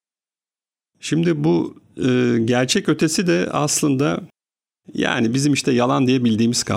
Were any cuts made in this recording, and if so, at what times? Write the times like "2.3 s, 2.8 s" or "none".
none